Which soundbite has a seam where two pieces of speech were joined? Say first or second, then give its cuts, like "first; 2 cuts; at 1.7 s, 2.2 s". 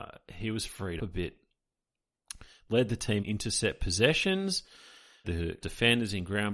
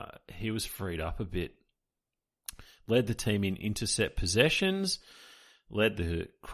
first; 4 cuts; at 1.0 s, 3.2 s, 5.2 s, 5.6 s